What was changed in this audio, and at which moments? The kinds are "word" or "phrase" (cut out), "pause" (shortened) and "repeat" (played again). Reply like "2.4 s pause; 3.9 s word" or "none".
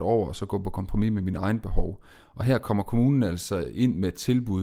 none